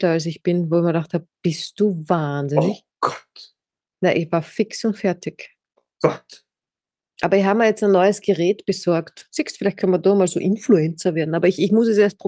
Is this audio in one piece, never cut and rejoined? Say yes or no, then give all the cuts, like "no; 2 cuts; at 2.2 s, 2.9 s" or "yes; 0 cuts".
yes; 0 cuts